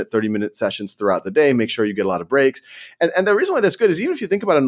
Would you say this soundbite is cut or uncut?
uncut